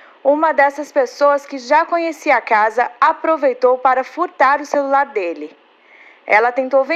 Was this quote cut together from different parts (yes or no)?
no